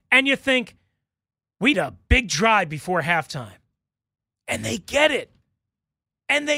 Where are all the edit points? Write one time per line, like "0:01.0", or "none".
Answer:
0:01.7